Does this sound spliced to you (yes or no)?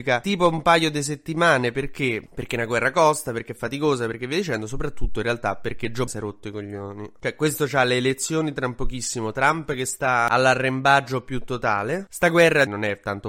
yes